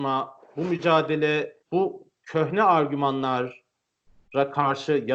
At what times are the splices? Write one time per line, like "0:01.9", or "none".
0:01.6